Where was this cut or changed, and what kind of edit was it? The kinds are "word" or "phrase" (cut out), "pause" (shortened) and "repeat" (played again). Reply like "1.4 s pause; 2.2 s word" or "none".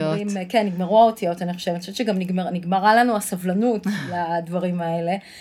none